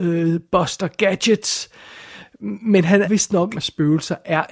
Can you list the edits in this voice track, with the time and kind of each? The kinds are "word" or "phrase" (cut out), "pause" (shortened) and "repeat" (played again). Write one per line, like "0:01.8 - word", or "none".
0:03.0 - word
0:03.5 - phrase